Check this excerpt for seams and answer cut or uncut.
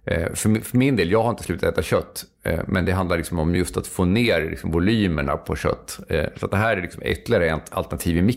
uncut